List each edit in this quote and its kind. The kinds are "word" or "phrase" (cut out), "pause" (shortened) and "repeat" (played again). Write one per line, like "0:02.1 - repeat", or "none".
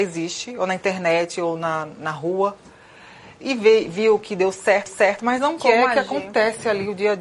0:04.9 - repeat
0:05.6 - phrase